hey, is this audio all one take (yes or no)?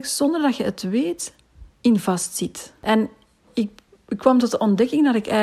no